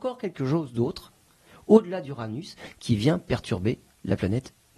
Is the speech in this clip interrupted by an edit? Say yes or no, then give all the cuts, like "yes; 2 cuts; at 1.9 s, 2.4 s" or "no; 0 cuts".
no; 0 cuts